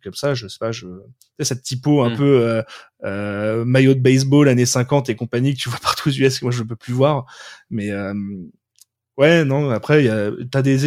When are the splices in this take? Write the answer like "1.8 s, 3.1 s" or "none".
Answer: none